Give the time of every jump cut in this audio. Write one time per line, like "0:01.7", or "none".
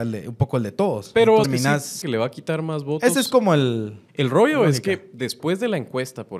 0:01.4
0:02.0
0:04.1